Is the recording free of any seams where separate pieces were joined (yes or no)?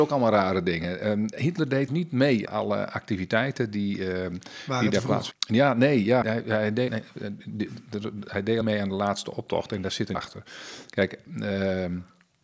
no